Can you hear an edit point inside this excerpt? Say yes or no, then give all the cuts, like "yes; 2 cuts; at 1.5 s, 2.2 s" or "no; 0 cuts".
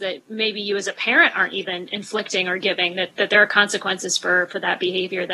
no; 0 cuts